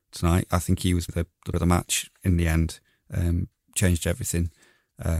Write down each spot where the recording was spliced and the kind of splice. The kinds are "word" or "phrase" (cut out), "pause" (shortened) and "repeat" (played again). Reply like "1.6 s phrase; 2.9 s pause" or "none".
1.1 s word; 1.5 s word